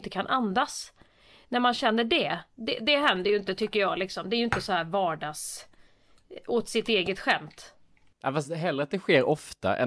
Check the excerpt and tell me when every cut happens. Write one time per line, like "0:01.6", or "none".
none